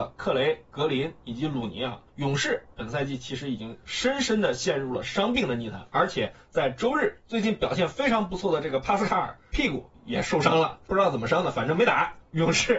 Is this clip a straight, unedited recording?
no; 1 cut; at 2.1 s

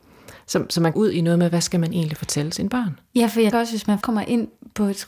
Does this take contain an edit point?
yes; 3 cuts; at 0.9 s, 3.5 s, 4.0 s

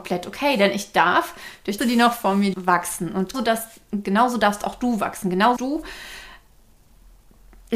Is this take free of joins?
no; 4 cuts; at 1.8 s, 2.5 s, 3.3 s, 5.6 s

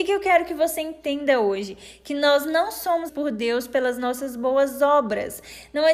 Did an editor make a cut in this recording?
yes; 1 cut; at 3.1 s

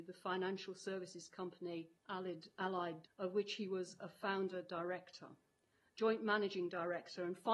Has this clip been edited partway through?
yes; 2 cuts; at 2.0 s, 3.0 s

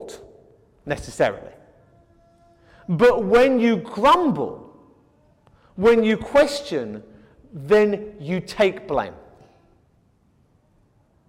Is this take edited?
no; 0 cuts

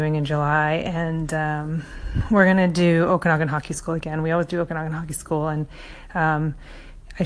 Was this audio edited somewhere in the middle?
no; 0 cuts

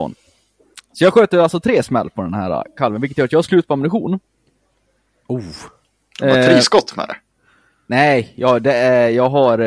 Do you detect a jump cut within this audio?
no; 0 cuts

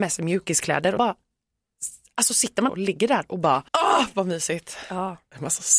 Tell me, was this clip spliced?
yes; 3 cuts; at 1.0 s, 2.7 s, 3.7 s

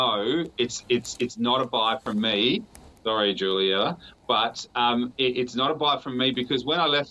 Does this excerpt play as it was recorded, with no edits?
yes; 0 cuts

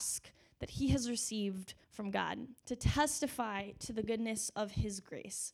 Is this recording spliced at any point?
yes; 2 cuts; at 1.8 s, 2.6 s

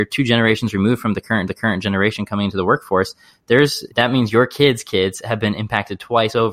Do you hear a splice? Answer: yes; 2 cuts; at 1.5 s, 3.9 s

